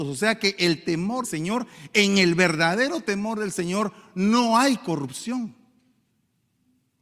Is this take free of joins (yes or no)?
no